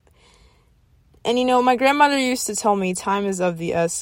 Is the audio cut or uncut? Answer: uncut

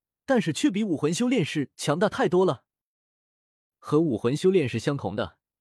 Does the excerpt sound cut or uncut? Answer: uncut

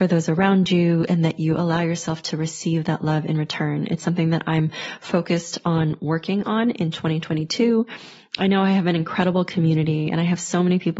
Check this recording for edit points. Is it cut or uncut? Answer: uncut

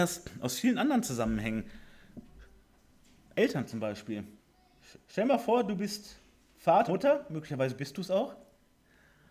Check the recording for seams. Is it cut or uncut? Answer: cut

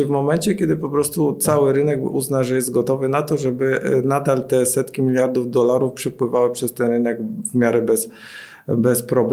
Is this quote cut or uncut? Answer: uncut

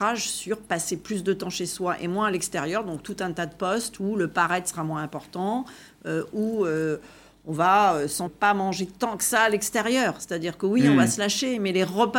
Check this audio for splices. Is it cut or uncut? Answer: cut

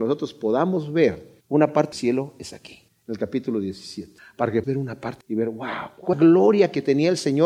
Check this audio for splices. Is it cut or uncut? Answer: cut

